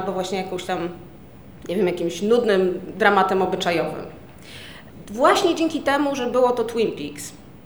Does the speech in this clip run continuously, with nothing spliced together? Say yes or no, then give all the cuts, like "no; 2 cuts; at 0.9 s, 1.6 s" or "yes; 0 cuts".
yes; 0 cuts